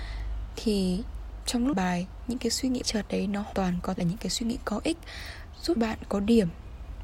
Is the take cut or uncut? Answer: cut